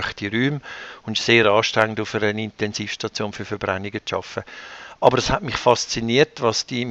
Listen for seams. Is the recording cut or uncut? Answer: uncut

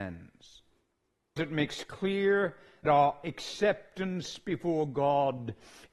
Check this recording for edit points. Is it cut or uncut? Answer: cut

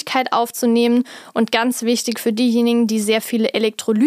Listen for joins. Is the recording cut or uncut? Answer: uncut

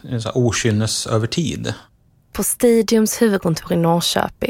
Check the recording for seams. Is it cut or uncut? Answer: uncut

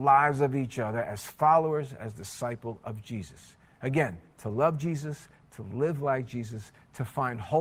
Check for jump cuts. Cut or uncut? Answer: uncut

